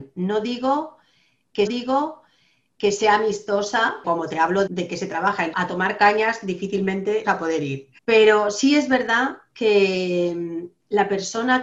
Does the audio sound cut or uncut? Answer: cut